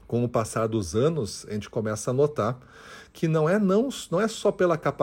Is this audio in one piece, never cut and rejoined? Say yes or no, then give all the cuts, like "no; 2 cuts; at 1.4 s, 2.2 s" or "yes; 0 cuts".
yes; 0 cuts